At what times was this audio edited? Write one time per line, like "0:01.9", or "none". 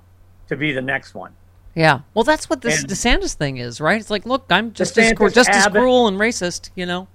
0:02.1